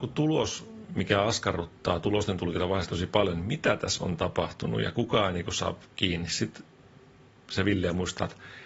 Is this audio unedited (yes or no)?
yes